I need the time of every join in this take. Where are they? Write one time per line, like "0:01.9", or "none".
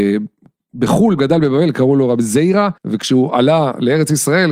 0:01.2
0:02.8